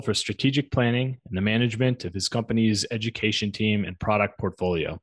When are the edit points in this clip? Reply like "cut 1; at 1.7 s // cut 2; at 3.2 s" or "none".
none